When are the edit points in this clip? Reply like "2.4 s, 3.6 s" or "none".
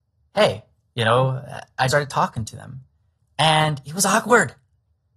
1.9 s